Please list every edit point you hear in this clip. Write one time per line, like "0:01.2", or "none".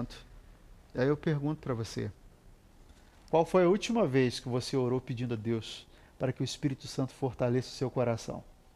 none